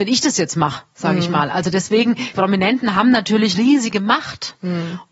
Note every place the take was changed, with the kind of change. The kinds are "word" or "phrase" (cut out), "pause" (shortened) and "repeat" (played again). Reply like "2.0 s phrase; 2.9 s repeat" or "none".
2.3 s word; 3.5 s word